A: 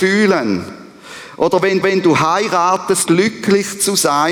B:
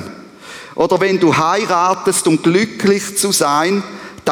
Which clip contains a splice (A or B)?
A